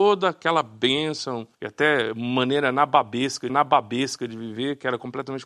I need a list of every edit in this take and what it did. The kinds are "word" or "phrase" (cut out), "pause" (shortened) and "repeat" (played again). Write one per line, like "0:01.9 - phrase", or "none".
0:01.5 - pause
0:03.5 - repeat